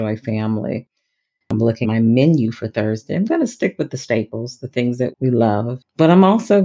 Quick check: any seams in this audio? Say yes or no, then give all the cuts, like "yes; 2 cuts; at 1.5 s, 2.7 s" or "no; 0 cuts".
yes; 2 cuts; at 1.8 s, 5.1 s